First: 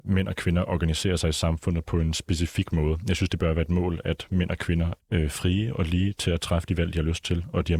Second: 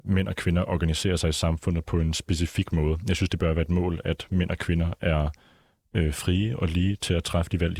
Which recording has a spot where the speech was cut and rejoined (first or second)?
first